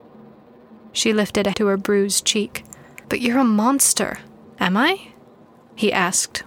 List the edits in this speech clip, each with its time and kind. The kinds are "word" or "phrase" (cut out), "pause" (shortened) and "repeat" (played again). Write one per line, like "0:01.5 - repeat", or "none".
0:00.9 - pause
0:01.5 - word
0:03.0 - pause
0:04.4 - pause